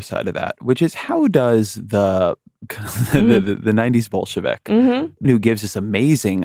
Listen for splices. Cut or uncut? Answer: cut